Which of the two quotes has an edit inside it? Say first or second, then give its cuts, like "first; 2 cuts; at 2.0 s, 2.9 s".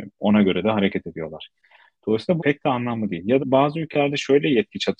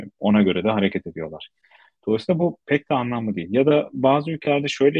first; 2 cuts; at 2.4 s, 3.4 s